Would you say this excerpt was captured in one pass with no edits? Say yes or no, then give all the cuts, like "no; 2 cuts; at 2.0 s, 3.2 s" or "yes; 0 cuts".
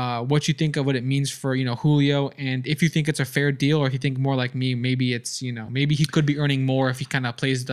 yes; 0 cuts